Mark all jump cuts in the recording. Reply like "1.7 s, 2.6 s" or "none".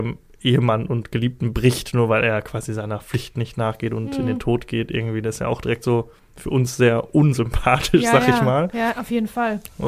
none